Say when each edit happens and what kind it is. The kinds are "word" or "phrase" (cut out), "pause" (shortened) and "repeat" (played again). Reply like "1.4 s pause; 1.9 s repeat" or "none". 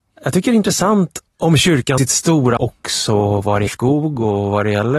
1.3 s pause; 2.0 s word; 2.6 s word; 3.7 s word